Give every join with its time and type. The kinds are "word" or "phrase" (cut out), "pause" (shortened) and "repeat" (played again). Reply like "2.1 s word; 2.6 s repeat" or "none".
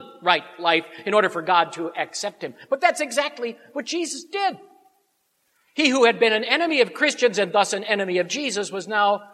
none